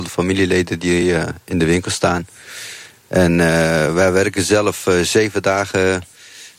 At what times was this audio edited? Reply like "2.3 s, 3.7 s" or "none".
none